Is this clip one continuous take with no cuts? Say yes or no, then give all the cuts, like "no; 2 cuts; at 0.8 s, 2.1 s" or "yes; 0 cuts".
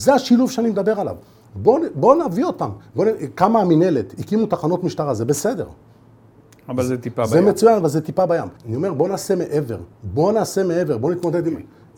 no; 2 cuts; at 8.6 s, 9.9 s